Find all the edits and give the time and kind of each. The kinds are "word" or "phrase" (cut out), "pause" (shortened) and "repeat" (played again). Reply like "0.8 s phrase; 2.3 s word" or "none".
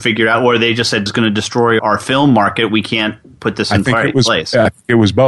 1.1 s word; 1.8 s word